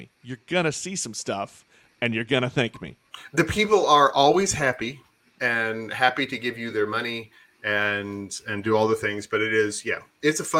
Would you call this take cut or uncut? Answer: uncut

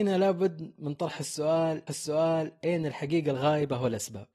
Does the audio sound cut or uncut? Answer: cut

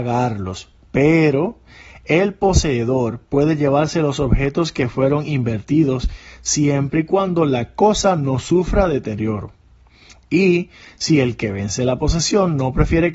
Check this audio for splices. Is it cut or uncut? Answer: uncut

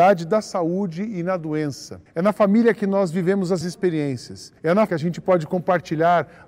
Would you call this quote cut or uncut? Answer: cut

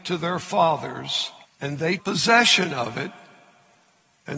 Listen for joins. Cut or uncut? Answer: cut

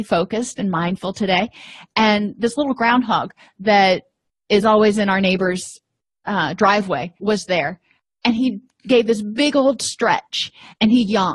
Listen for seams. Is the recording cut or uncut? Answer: cut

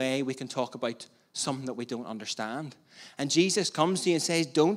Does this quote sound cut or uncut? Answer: uncut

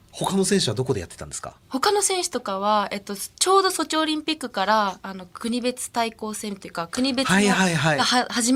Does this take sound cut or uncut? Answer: cut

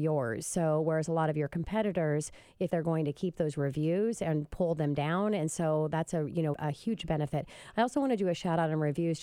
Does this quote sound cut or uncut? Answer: cut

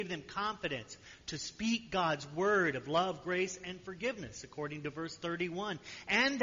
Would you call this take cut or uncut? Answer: uncut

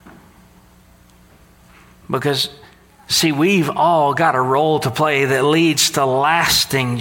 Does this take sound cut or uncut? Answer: uncut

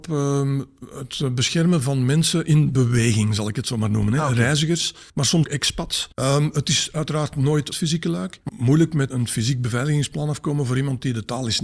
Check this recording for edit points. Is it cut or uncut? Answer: cut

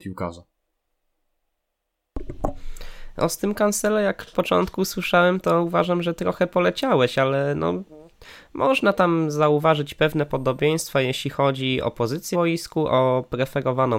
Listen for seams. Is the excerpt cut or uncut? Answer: cut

